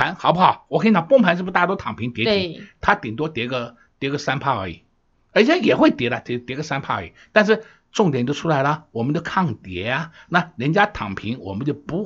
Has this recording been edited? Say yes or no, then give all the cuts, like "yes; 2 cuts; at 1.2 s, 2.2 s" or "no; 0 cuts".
no; 0 cuts